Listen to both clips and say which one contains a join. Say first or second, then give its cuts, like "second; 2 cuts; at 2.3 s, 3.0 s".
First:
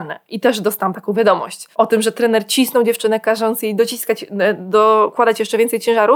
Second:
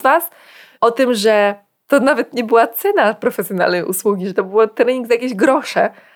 first; 1 cut; at 1.7 s